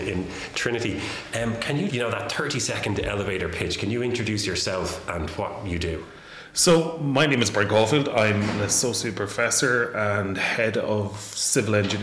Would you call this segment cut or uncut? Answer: cut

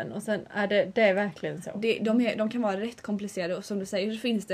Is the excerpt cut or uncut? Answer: uncut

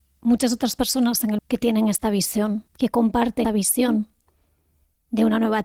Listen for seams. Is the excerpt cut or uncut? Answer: cut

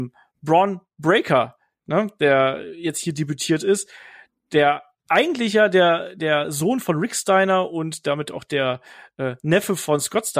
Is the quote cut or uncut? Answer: uncut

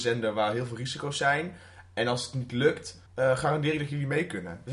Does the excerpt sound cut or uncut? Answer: cut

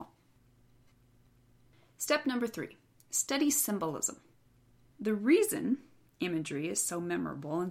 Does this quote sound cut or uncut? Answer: uncut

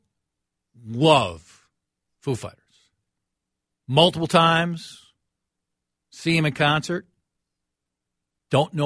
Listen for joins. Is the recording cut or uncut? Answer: uncut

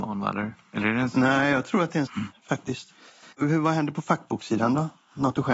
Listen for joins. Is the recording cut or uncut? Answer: cut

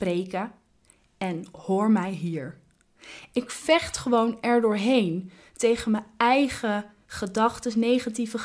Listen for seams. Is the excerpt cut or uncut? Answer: uncut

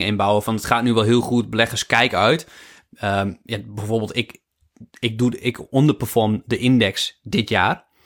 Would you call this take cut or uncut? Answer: uncut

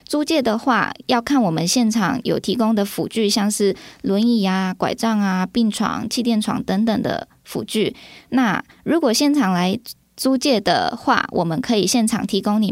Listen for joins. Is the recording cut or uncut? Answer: uncut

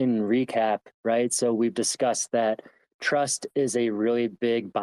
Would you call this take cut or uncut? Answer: uncut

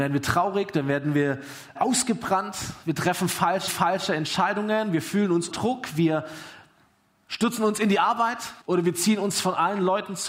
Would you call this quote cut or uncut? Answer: cut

